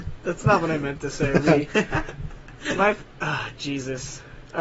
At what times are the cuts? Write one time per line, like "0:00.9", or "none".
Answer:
none

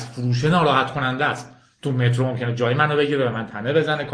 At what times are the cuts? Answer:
none

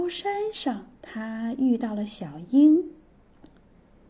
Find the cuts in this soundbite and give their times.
0:00.9

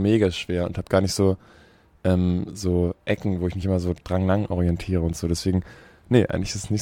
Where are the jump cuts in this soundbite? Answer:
none

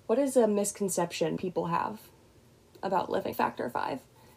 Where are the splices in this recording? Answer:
0:01.4
0:03.3

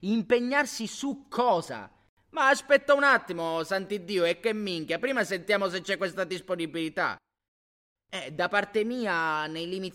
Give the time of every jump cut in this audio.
none

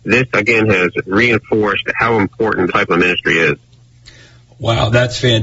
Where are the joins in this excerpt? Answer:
0:02.7

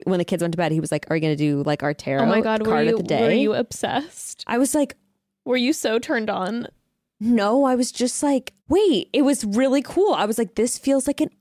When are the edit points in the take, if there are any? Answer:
0:08.6

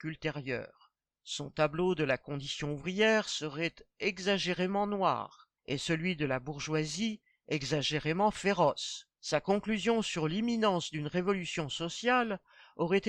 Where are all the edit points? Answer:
0:01.0
0:05.6
0:09.1

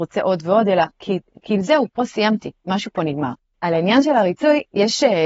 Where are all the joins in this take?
none

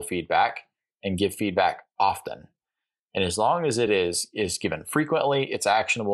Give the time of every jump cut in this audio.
none

